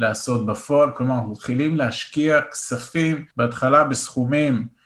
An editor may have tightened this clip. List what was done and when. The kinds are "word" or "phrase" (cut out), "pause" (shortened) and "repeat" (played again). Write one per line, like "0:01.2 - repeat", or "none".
0:03.3 - pause